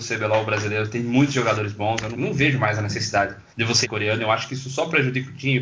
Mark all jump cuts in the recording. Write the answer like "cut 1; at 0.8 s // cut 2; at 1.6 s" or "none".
cut 1; at 2.1 s // cut 2; at 3.5 s // cut 3; at 3.8 s